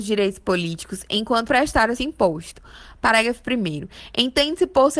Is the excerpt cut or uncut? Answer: cut